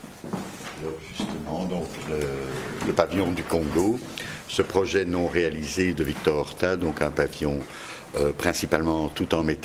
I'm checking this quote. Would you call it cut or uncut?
uncut